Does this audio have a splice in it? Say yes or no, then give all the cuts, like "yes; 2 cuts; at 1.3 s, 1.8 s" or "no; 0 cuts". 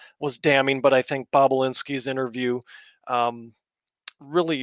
no; 0 cuts